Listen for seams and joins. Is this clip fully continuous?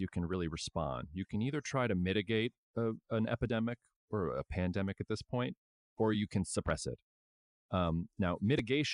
yes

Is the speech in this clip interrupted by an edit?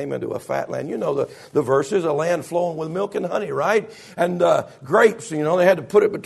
no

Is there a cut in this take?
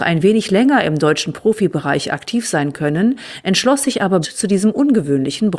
yes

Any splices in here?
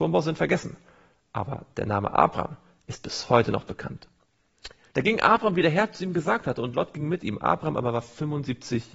no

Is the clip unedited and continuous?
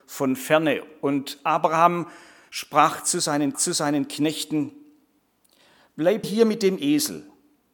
no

